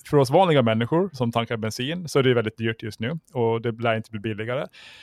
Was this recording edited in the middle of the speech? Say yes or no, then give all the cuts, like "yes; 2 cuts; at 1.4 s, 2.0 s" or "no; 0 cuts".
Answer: yes; 1 cut; at 1.1 s